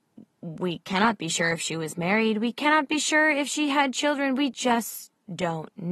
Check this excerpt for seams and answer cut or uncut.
uncut